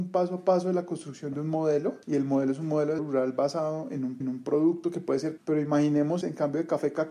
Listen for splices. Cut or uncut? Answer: cut